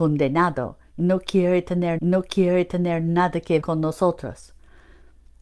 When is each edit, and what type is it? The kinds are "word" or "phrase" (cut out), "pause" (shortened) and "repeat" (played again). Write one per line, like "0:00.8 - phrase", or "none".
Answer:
0:02.0 - repeat
0:03.6 - word